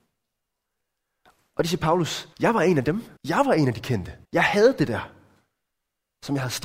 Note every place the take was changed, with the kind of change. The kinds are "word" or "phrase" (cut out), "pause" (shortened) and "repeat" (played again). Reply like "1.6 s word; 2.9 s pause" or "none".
2.3 s pause; 3.2 s pause; 4.2 s pause